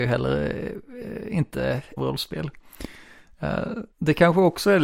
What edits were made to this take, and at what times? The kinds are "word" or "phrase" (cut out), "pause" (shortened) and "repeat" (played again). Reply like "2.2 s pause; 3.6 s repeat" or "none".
2.0 s phrase; 3.9 s pause